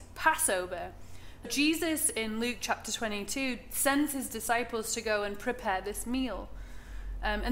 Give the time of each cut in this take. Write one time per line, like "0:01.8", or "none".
0:01.4